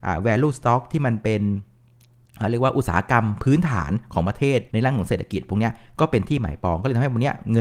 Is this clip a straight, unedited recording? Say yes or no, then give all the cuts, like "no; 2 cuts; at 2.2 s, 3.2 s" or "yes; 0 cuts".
no; 1 cut; at 4.7 s